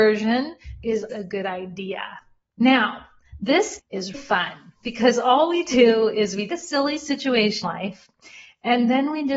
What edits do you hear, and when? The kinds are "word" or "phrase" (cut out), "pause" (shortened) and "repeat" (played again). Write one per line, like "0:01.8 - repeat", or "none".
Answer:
0:01.1 - word
0:03.8 - word
0:04.1 - word
0:06.5 - word
0:07.6 - word